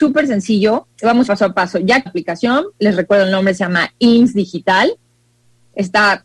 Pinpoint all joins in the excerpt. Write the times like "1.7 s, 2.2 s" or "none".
0.9 s, 1.3 s, 2.1 s